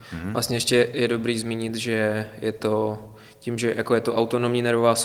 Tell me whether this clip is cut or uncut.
uncut